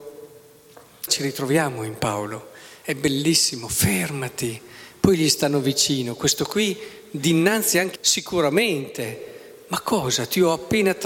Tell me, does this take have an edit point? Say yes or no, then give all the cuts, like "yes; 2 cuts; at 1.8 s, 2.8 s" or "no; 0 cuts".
yes; 2 cuts; at 1.1 s, 8.0 s